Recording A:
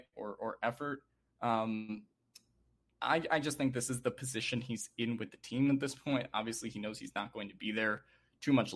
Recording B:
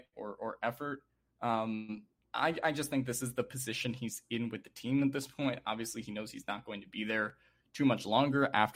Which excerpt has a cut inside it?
B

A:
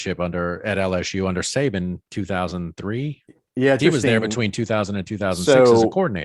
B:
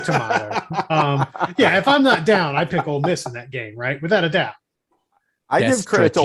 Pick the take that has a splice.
A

